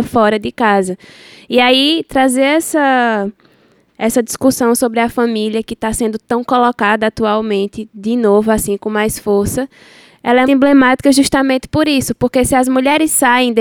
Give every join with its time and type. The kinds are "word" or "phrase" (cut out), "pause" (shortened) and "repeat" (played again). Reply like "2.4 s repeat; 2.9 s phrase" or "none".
7.9 s word; 10.4 s word